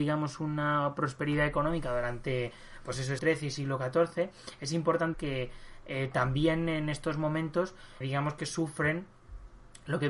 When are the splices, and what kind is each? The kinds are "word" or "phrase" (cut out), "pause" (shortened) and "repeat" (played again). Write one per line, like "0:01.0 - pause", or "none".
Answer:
0:03.2 - word
0:05.1 - word
0:08.0 - word